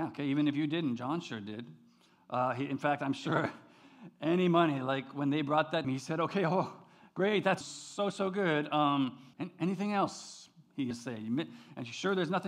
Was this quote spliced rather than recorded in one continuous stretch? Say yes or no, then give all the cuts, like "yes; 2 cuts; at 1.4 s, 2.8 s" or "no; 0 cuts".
yes; 4 cuts; at 5.8 s, 7.6 s, 9.3 s, 10.9 s